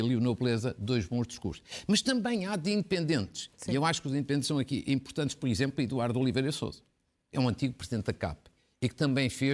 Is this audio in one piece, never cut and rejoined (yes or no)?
yes